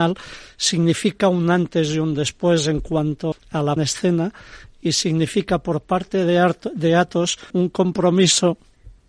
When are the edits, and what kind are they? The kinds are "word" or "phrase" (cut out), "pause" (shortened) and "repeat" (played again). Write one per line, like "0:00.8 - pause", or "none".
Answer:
0:03.3 - word
0:03.8 - phrase
0:07.5 - pause